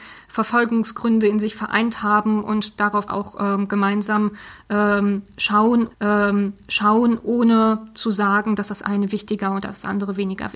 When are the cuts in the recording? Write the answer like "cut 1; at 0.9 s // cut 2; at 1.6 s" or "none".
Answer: cut 1; at 3.1 s // cut 2; at 5.9 s